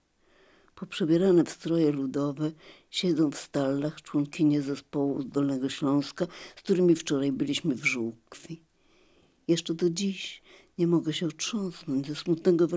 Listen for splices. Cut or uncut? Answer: uncut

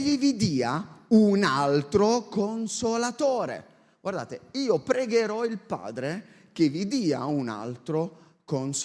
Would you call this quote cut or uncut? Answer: uncut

